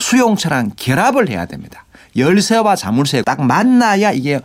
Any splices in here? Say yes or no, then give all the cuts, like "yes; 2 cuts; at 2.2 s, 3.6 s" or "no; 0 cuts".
yes; 1 cut; at 3.2 s